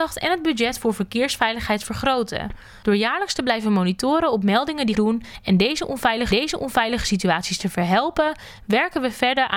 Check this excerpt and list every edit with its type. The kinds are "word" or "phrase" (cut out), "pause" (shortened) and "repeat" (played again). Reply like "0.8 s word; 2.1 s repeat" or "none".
4.9 s word; 6.3 s repeat